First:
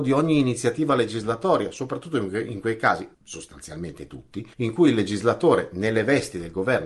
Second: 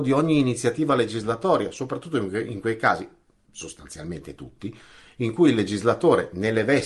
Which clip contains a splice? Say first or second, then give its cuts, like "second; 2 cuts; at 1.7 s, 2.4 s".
first; 2 cuts; at 3.1 s, 4.5 s